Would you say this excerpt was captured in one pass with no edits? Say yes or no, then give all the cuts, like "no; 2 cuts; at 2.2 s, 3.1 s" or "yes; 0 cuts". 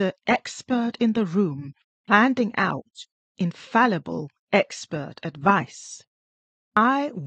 yes; 0 cuts